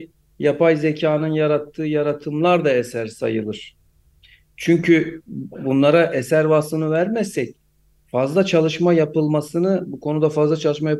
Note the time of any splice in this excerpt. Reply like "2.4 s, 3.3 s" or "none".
none

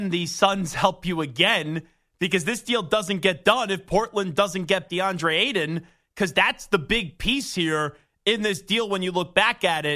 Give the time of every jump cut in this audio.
4.9 s

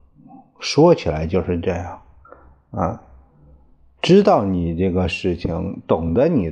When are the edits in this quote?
none

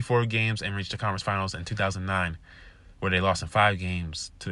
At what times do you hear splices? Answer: none

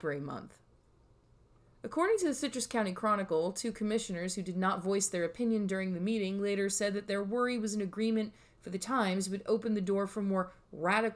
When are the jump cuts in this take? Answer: none

